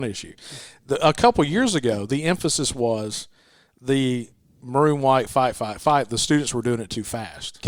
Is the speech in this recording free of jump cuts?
yes; 0 cuts

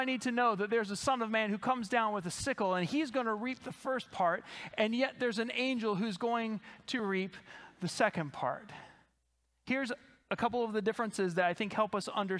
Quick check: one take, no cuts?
yes; 0 cuts

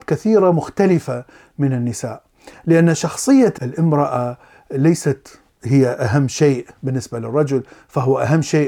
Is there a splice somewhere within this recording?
no; 0 cuts

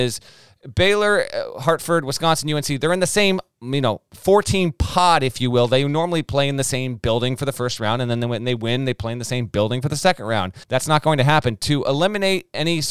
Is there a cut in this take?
yes; 1 cut; at 10.6 s

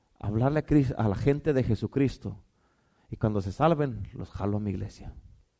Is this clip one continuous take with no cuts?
yes; 0 cuts

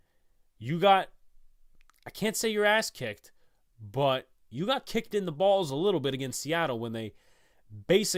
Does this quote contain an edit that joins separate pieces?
no; 0 cuts

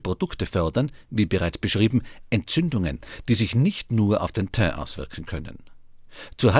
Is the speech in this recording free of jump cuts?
yes; 0 cuts

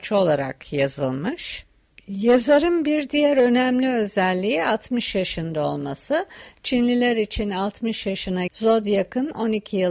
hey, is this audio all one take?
no; 1 cut; at 8.5 s

